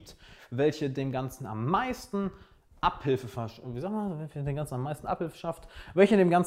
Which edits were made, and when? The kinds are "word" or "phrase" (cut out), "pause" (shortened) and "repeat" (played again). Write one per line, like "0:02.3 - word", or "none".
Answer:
none